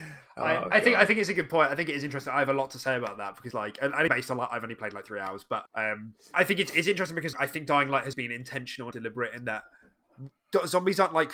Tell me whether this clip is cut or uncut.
cut